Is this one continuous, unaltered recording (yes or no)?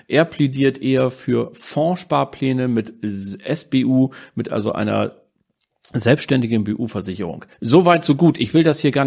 no